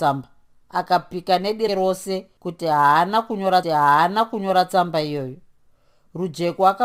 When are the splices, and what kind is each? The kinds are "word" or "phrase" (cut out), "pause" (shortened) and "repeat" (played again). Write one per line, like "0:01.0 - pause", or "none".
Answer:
0:01.7 - word
0:03.6 - repeat